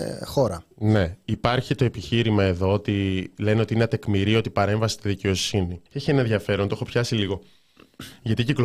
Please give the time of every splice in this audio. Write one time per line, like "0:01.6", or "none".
0:05.9